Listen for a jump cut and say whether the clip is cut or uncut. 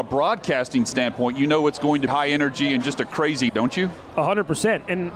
cut